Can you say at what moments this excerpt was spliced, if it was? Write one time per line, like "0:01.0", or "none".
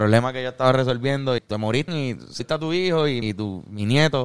0:01.4
0:01.9
0:02.4
0:03.2